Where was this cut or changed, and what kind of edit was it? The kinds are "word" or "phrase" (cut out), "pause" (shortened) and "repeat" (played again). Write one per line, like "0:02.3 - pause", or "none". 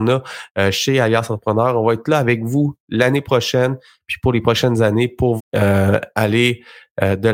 0:05.4 - word